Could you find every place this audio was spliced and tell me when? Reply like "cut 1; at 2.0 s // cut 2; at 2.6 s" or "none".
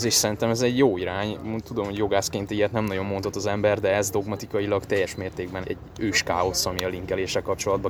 cut 1; at 5.6 s